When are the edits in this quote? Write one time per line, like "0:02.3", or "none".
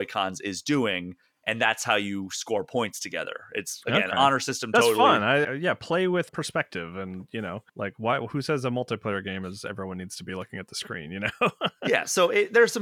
0:05.4
0:06.3
0:07.7